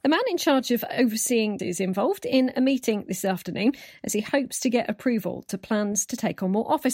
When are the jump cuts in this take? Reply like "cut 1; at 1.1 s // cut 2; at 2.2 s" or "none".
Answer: cut 1; at 1.6 s